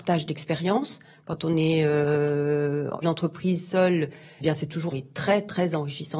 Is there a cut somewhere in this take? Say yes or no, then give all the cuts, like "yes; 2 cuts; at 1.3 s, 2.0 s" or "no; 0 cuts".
yes; 3 cuts; at 3.0 s, 4.4 s, 4.9 s